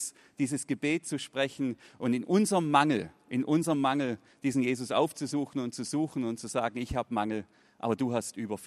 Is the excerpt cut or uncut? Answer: uncut